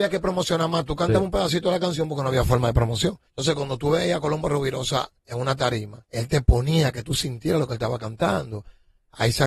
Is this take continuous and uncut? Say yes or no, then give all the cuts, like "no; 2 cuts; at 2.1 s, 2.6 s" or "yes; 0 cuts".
no; 3 cuts; at 3.3 s, 5.2 s, 6.1 s